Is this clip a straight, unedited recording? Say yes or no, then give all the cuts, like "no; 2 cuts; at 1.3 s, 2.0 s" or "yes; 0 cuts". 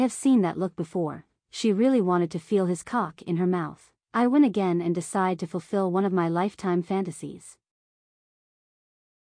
no; 1 cut; at 4.0 s